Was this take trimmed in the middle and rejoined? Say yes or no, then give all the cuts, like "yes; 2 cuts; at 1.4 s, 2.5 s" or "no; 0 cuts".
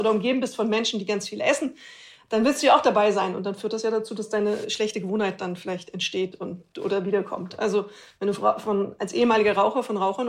no; 0 cuts